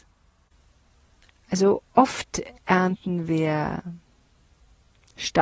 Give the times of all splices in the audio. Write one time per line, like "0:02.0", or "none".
0:02.6